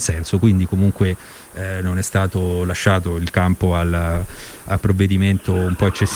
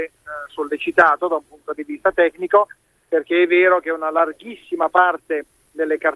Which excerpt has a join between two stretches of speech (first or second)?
first